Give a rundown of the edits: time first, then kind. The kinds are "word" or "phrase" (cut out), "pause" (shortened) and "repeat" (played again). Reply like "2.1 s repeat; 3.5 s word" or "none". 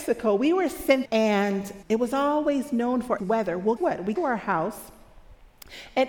1.0 s word; 1.8 s word; 3.2 s word; 3.8 s word; 4.2 s word